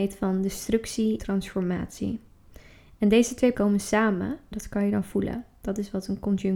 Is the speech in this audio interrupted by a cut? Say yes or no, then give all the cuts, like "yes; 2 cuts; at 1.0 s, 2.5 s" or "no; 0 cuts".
yes; 3 cuts; at 1.2 s, 3.5 s, 4.5 s